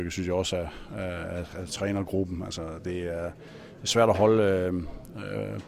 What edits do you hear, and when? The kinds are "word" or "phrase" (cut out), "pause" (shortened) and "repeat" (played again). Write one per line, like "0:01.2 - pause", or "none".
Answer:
none